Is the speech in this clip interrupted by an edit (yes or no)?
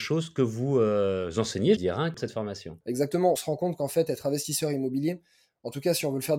yes